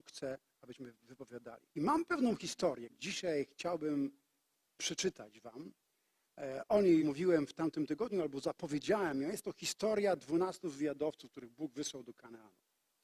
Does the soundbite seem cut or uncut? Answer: cut